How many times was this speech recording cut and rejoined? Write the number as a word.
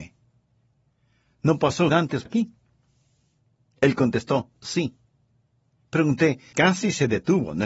three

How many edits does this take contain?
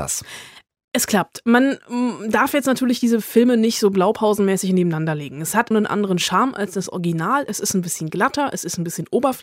one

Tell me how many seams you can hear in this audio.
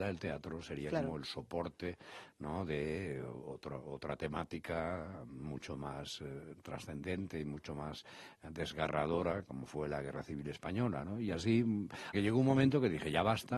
one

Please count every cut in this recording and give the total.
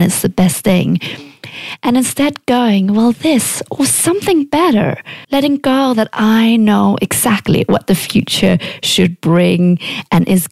one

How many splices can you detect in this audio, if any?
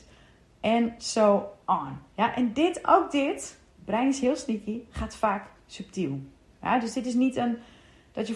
one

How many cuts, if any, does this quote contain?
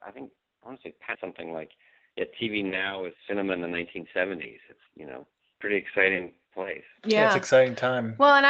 three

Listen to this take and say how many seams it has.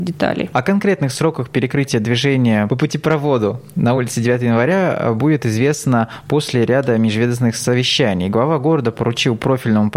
zero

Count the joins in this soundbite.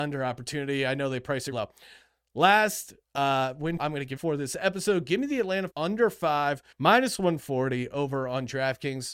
six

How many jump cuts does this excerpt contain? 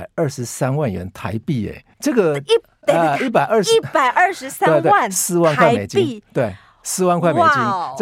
one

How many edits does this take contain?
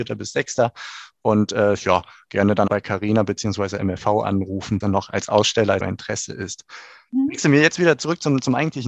three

